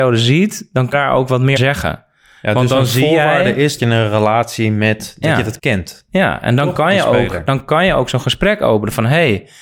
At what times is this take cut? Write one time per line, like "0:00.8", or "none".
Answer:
0:00.9
0:01.6
0:03.8
0:05.6

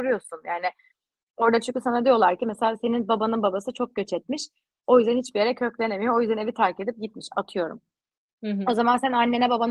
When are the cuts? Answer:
none

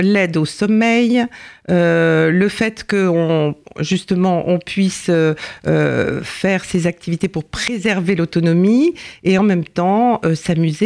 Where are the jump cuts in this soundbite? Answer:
none

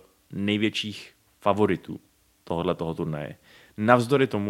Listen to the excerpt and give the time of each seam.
none

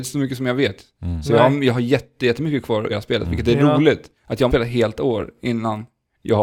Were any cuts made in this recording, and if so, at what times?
0:02.9
0:04.2
0:04.5

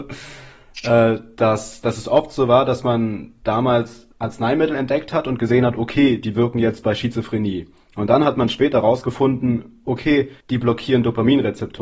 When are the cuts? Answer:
0:04.1
0:10.4

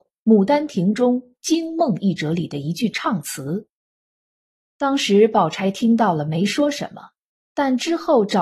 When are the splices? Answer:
none

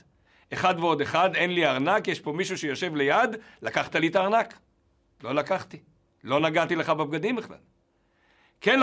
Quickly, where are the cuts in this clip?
none

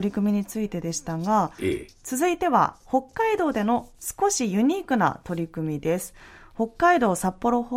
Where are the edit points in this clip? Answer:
none

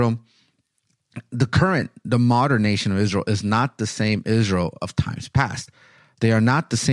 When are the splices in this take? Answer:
none

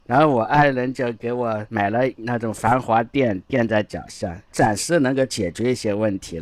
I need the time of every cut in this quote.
0:04.5

